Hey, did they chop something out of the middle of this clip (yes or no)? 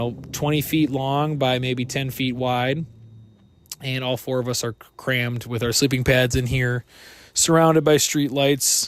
no